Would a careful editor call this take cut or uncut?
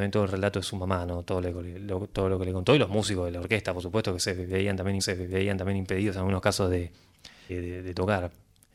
cut